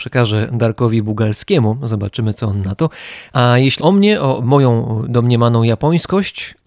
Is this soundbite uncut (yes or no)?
no